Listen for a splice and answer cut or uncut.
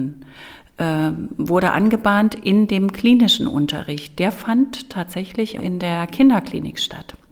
cut